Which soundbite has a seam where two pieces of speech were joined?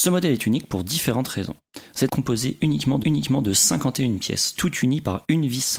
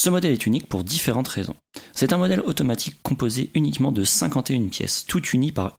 first; 2 cuts; at 2.1 s, 3.0 s

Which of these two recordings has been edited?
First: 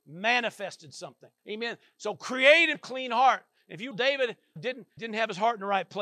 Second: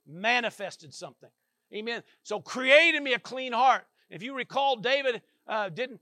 first; 5 cuts; at 1.4 s, 2.7 s, 3.9 s, 4.6 s, 5.0 s

